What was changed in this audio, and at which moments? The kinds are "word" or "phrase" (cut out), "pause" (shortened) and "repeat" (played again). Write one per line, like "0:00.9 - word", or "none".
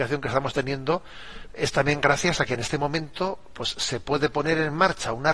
none

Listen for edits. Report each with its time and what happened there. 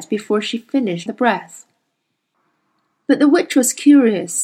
0:01.1 - word

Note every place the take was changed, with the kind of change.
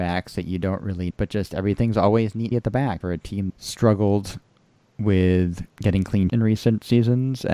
0:01.1 - word
0:02.5 - phrase
0:03.0 - word
0:03.5 - word
0:05.7 - pause
0:06.3 - word

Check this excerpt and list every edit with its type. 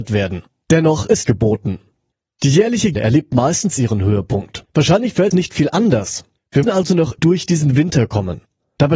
0:01.2 - word
0:02.9 - word
0:03.7 - phrase
0:04.7 - pause
0:05.3 - phrase
0:06.6 - word
0:07.2 - word

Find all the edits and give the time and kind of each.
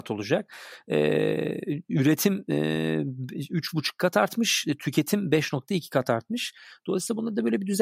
none

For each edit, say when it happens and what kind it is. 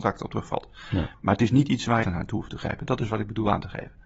0:02.0 - phrase

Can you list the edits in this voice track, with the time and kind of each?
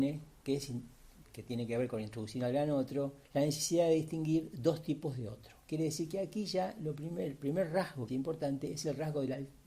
0:01.3 - word
0:03.2 - pause
0:08.1 - phrase

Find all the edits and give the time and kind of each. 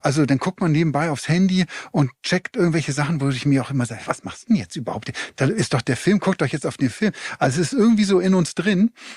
none

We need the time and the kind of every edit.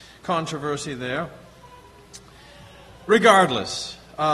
none

